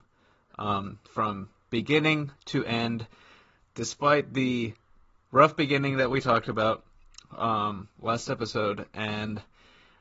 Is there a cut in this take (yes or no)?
no